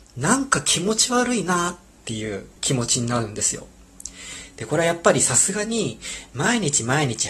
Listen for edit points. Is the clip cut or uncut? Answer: cut